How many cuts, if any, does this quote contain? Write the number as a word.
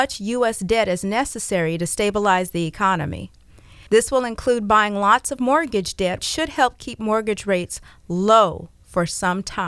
two